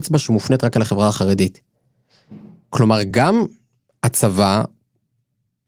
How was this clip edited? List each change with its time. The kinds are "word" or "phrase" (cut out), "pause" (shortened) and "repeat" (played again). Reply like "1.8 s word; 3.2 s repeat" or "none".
none